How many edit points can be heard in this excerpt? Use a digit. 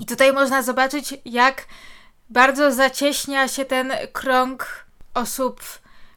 0